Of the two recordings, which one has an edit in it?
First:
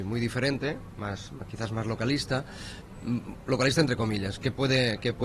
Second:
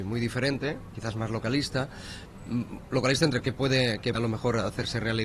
second; 3 cuts; at 0.9 s, 3.4 s, 4.1 s

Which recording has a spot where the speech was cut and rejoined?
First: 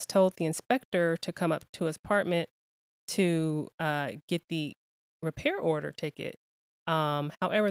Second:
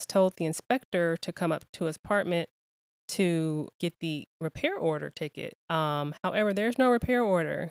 second; 3 cuts; at 3.7 s, 4.3 s, 5.6 s

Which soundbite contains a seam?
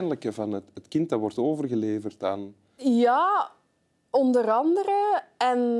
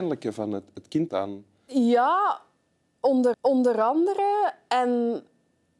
second; 2 cuts; at 1.1 s, 3.3 s

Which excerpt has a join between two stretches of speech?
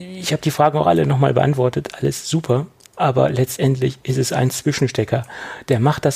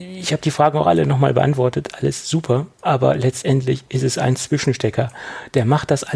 second; 1 cut; at 2.7 s

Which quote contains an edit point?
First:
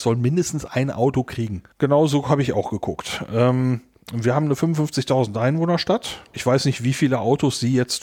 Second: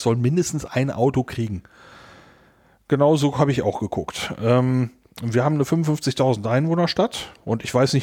first; 2 cuts; at 1.7 s, 6.3 s

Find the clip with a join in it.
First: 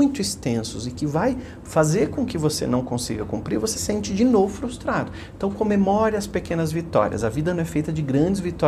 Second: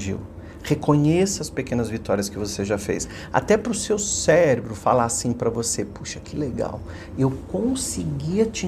first; 1 cut; at 3.7 s

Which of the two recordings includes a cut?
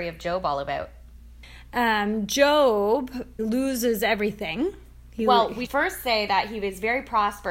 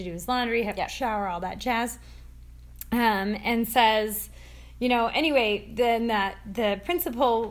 first; 2 cuts; at 3.4 s, 5.7 s

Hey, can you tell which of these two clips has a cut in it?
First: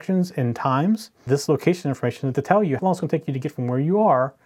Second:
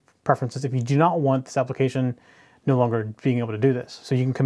first; 3 cuts; at 1.3 s, 2.3 s, 2.8 s

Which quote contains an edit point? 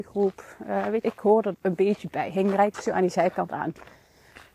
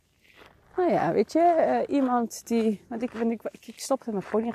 first; 3 cuts; at 1.0 s, 1.5 s, 2.7 s

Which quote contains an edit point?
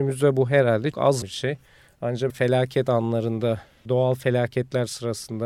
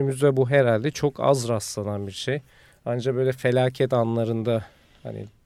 first; 4 cuts; at 0.9 s, 1.2 s, 2.3 s, 3.9 s

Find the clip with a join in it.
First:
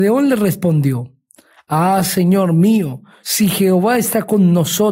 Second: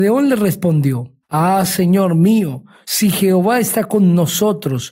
second; 1 cut; at 1.2 s

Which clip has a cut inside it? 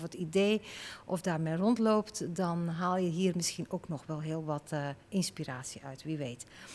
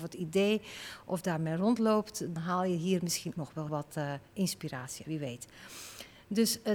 second; 4 cuts; at 2.4 s, 3.3 s, 3.7 s, 5.0 s

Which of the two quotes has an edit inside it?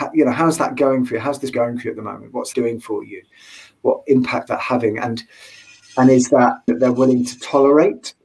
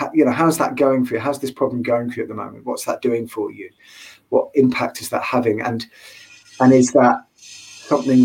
first; 4 cuts; at 1.5 s, 2.5 s, 4.5 s, 6.7 s

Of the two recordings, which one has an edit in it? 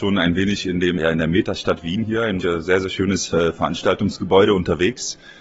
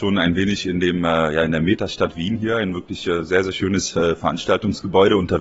first; 2 cuts; at 1.0 s, 2.4 s

